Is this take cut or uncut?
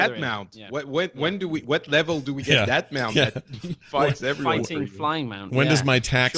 uncut